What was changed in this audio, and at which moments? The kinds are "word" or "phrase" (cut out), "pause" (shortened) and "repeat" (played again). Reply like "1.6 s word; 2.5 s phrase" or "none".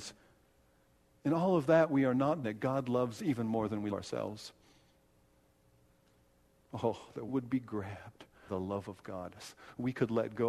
2.4 s word; 3.2 s word; 3.9 s word; 7.3 s word; 8.5 s word; 9.4 s word